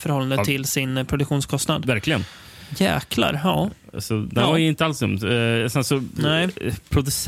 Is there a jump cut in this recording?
no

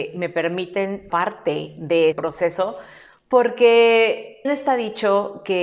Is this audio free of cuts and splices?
no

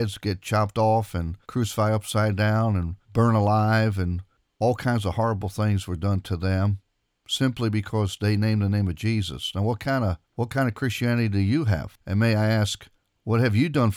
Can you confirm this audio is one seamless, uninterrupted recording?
no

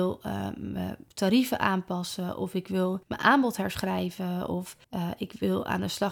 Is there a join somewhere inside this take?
yes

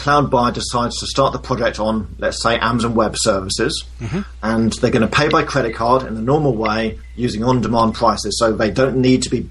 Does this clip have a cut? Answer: no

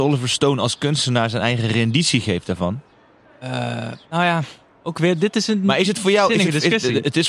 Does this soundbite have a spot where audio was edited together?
yes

